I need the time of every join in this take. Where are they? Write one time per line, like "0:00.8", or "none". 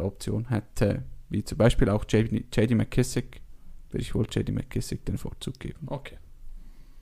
none